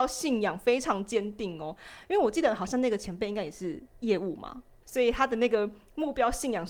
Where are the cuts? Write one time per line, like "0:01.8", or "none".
0:04.8